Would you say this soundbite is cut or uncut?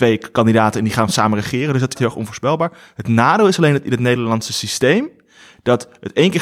cut